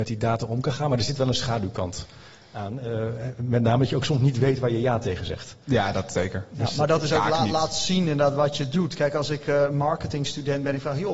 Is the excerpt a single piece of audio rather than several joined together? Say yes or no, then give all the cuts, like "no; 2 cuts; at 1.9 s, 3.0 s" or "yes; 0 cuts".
yes; 0 cuts